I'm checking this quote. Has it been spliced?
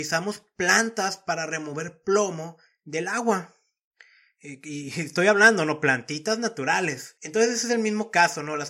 yes; 1 cut; at 7.2 s

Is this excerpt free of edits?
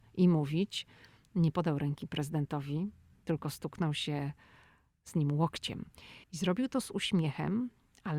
no; 1 cut; at 6.2 s

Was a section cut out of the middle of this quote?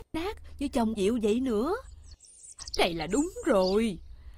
yes; 2 cuts; at 1.0 s, 2.8 s

